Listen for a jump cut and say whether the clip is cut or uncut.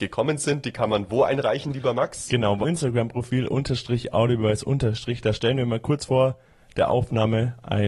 cut